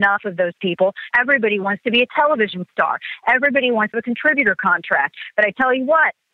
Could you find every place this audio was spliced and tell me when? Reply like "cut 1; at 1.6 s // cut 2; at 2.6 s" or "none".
cut 1; at 1.1 s // cut 2; at 3.9 s